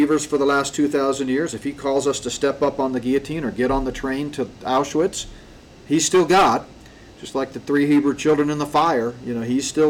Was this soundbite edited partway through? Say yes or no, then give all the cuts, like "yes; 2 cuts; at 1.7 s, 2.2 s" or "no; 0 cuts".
no; 0 cuts